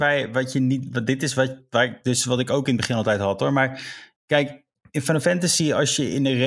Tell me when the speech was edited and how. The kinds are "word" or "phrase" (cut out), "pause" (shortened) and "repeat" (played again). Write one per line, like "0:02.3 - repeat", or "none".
none